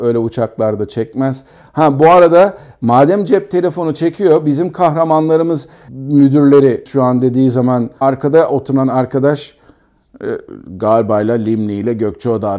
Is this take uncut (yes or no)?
no